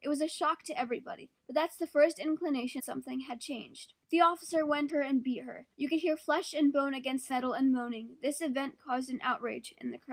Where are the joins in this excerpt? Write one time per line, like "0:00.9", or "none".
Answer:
0:01.4
0:02.8
0:04.0
0:04.9
0:05.7
0:07.3